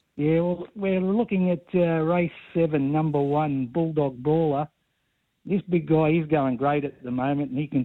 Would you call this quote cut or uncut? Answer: uncut